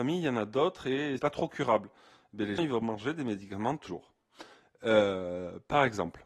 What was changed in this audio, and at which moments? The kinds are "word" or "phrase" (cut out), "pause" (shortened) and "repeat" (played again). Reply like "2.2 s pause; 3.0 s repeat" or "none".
1.2 s word; 2.6 s word; 3.9 s word